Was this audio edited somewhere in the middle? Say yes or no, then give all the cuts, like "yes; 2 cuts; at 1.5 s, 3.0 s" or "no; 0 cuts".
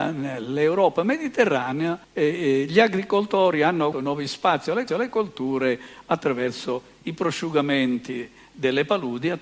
yes; 3 cuts; at 2.0 s, 3.9 s, 4.9 s